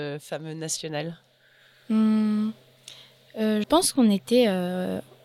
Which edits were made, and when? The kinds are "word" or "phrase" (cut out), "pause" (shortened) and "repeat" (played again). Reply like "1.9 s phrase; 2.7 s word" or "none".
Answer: 3.6 s word